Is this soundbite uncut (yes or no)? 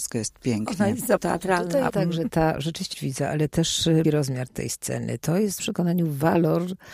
no